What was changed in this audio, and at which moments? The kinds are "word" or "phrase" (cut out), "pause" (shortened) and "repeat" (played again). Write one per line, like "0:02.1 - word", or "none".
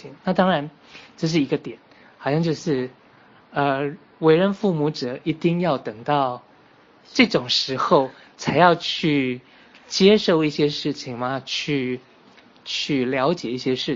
none